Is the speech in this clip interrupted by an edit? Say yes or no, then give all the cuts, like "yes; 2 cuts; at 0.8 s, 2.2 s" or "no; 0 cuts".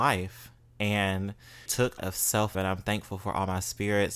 yes; 3 cuts; at 1.7 s, 2.0 s, 2.5 s